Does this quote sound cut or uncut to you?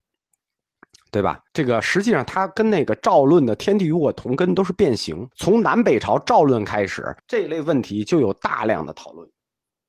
cut